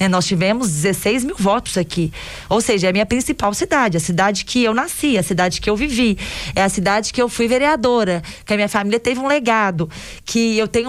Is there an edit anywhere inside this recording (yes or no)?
no